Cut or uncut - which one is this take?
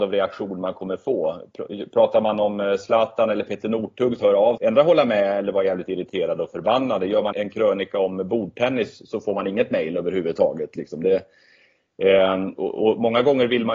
cut